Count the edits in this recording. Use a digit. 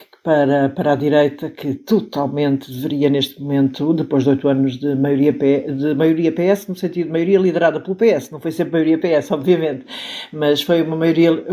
0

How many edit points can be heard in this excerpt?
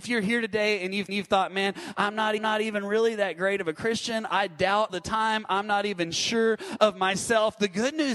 3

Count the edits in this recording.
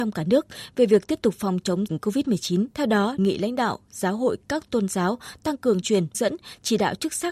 6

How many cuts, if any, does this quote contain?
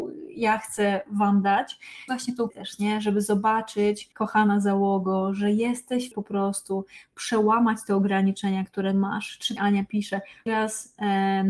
6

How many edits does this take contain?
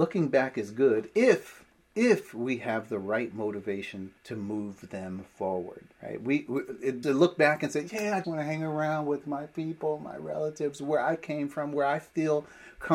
5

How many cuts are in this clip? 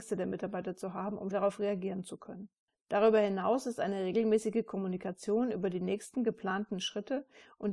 2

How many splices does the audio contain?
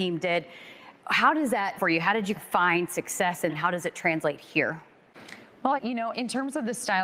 6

